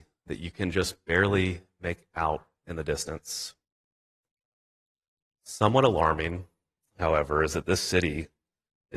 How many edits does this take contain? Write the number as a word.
zero